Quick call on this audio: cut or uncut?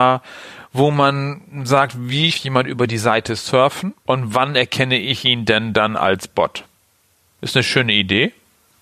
cut